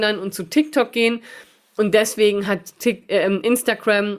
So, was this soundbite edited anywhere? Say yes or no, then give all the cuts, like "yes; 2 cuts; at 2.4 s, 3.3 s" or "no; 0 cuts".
no; 0 cuts